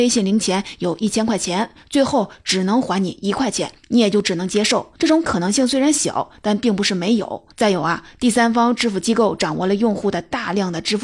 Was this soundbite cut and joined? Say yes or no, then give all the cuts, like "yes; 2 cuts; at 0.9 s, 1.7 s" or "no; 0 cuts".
yes; 3 cuts; at 3.8 s, 5.0 s, 7.5 s